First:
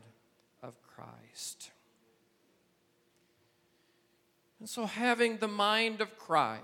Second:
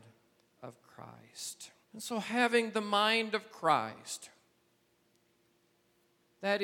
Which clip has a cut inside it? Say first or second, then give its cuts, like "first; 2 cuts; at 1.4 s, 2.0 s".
second; 1 cut; at 1.8 s